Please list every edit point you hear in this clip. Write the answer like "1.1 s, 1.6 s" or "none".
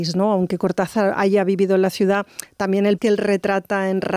3.0 s